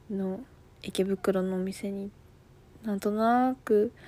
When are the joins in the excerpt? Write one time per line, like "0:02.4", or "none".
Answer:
none